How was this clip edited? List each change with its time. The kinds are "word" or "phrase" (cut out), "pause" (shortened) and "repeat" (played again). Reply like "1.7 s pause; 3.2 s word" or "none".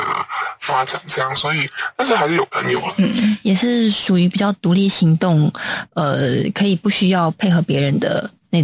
none